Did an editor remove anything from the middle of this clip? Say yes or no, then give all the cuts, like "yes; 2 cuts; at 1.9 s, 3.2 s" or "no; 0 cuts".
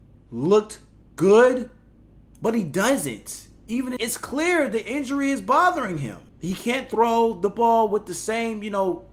yes; 2 cuts; at 4.0 s, 6.3 s